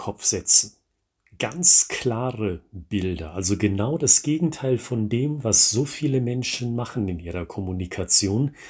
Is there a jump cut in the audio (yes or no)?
no